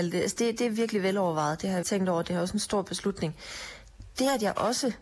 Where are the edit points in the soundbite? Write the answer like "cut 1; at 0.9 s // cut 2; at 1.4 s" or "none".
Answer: cut 1; at 1.8 s